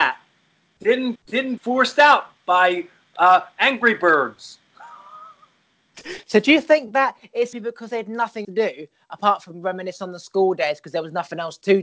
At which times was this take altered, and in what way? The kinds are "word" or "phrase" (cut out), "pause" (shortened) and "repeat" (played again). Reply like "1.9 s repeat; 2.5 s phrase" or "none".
1.2 s word; 1.6 s word; 7.5 s word; 8.4 s word